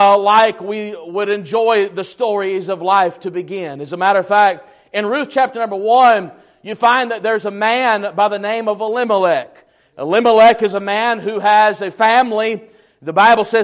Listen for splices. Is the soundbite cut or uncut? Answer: uncut